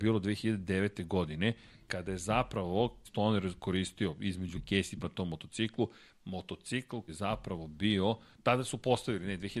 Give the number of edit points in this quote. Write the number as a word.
four